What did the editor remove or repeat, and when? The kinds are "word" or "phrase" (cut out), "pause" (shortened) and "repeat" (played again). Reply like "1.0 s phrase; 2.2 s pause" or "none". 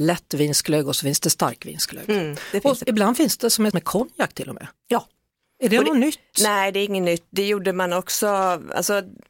3.7 s word; 5.3 s pause